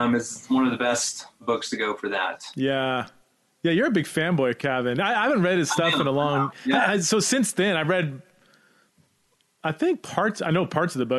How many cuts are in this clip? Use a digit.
0